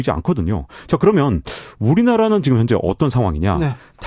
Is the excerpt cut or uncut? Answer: uncut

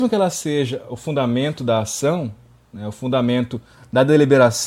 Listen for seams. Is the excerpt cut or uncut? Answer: uncut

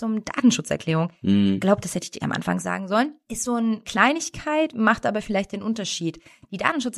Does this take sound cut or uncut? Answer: cut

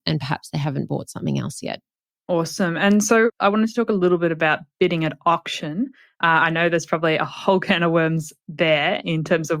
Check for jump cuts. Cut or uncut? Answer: uncut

